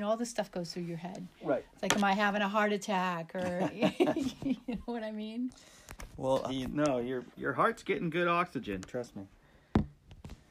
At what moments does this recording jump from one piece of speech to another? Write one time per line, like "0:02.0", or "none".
0:06.5
0:07.4